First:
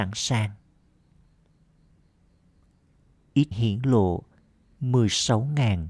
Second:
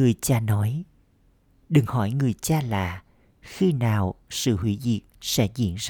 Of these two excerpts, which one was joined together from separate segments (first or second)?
first